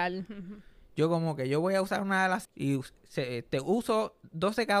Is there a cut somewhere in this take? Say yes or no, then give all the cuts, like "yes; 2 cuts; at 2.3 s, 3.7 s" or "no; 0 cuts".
yes; 1 cut; at 2.4 s